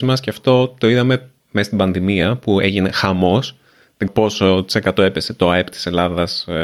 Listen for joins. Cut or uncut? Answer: cut